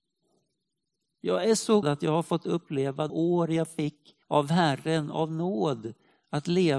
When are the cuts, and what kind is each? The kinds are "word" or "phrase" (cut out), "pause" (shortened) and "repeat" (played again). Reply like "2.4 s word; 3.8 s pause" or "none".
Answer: 1.8 s word; 3.1 s word; 4.2 s pause

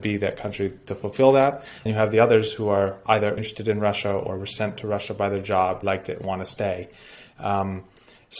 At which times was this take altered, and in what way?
1.9 s word; 3.4 s word; 5.8 s word

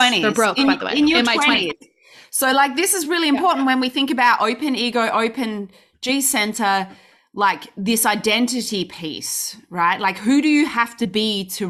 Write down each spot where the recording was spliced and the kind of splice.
none

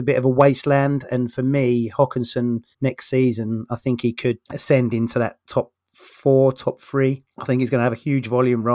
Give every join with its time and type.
2.7 s pause; 4.4 s pause; 7.3 s pause

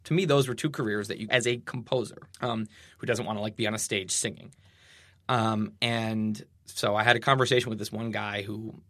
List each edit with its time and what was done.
1.3 s phrase; 2.3 s pause; 6.5 s pause

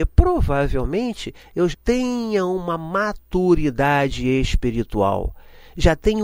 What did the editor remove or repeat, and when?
1.7 s word

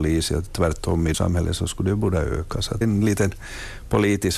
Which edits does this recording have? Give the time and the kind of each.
1.1 s word; 2.8 s word

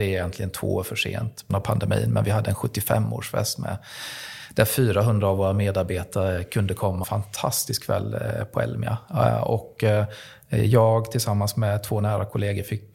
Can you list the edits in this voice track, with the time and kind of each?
1.5 s word; 7.0 s phrase

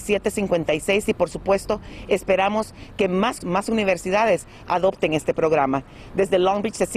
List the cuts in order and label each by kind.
3.4 s word

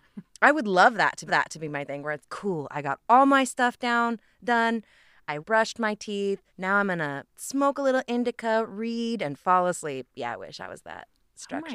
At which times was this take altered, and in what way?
1.3 s repeat; 2.2 s word; 5.4 s phrase; 6.5 s pause; 7.3 s pause

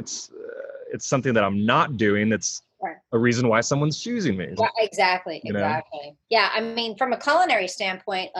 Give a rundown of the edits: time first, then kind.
4.6 s word; 6.2 s pause

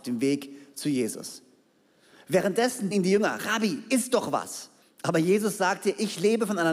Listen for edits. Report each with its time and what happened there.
2.9 s word; 4.8 s pause

